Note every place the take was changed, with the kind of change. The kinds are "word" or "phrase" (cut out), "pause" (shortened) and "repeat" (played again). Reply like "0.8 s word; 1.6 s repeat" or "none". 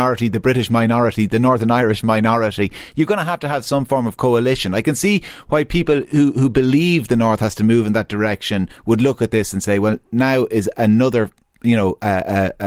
none